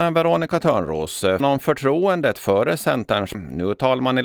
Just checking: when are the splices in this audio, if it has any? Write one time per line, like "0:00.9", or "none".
0:01.4
0:03.3